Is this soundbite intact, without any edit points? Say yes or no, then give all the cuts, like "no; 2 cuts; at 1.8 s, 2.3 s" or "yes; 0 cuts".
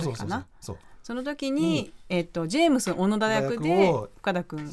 yes; 0 cuts